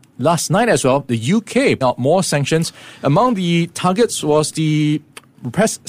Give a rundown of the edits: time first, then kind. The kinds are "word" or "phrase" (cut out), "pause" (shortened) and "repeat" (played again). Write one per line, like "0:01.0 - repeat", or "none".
0:01.8 - word